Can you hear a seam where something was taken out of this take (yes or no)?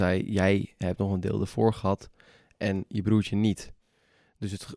no